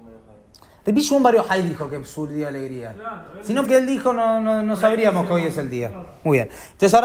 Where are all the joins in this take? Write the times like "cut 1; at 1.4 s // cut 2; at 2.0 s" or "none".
cut 1; at 3.6 s

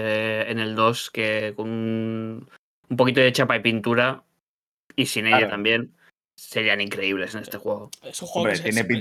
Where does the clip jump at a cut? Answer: none

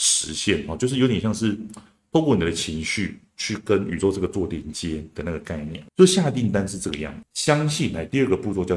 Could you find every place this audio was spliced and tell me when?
none

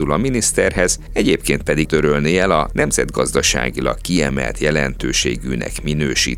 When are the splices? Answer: cut 1; at 1.8 s

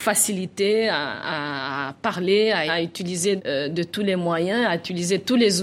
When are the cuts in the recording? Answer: cut 1; at 2.7 s // cut 2; at 3.4 s

